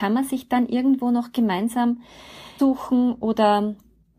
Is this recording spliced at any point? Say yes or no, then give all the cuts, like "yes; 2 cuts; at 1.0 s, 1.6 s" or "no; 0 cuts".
yes; 1 cut; at 2.6 s